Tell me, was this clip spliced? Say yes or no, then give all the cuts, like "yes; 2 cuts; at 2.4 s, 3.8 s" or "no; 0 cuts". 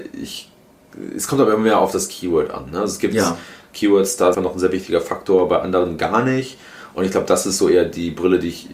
yes; 1 cut; at 4.3 s